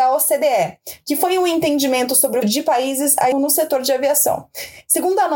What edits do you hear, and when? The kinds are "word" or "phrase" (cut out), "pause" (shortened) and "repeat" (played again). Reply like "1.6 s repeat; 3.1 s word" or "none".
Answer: 2.4 s word; 3.3 s word